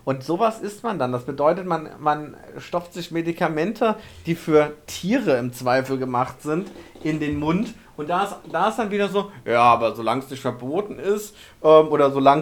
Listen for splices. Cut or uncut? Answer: uncut